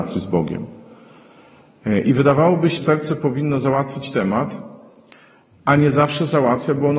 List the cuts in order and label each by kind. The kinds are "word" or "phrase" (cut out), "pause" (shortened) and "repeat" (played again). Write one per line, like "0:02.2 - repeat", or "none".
0:02.8 - word